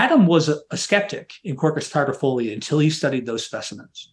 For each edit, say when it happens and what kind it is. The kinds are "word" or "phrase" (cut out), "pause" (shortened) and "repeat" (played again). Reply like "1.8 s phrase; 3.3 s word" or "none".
none